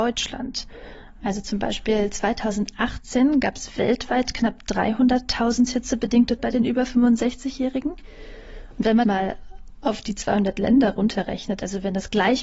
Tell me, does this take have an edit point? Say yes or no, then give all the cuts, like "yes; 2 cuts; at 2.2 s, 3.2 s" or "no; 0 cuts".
yes; 2 cuts; at 6.4 s, 9.0 s